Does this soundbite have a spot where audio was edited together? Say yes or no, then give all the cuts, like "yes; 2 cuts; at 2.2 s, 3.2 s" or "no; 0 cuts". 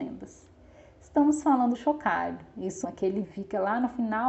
yes; 3 cuts; at 1.7 s, 2.8 s, 3.2 s